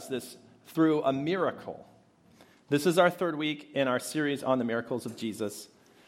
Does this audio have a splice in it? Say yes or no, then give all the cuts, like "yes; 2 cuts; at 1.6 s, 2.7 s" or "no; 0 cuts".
no; 0 cuts